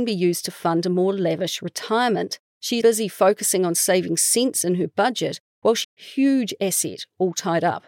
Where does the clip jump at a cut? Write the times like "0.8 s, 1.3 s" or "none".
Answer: 2.5 s, 2.8 s, 5.8 s

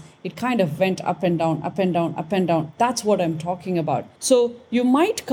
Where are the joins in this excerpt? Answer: 4.1 s

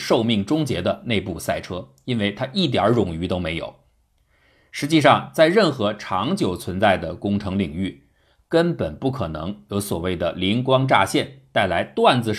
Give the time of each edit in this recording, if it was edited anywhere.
none

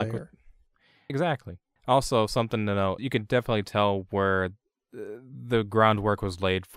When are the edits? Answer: 1.1 s, 1.8 s, 3.0 s

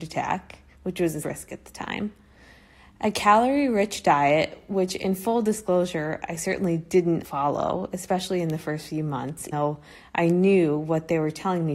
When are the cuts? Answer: 1.2 s, 7.2 s, 9.5 s

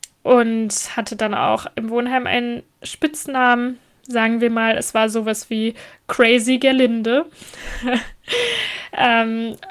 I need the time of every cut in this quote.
none

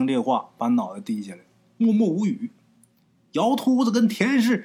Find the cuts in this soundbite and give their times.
none

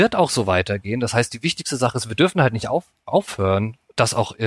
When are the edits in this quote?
none

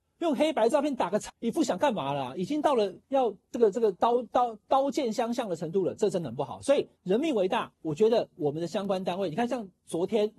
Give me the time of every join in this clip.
1.3 s, 3.0 s, 7.0 s, 7.7 s

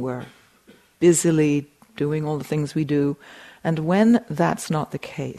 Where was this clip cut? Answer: none

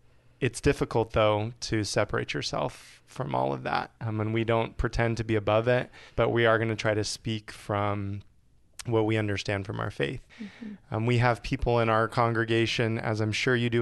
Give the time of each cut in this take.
3.9 s, 6.1 s, 10.3 s

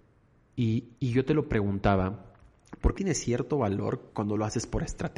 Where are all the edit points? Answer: 1.0 s, 2.9 s, 4.1 s

